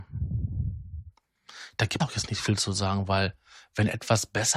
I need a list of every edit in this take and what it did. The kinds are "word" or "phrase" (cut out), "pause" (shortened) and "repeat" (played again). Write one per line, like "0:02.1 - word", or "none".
0:02.0 - word